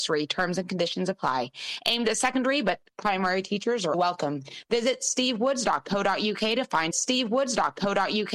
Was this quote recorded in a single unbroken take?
no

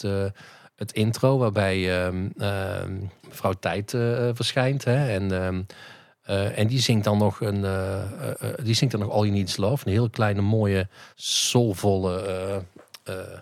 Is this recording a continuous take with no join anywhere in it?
no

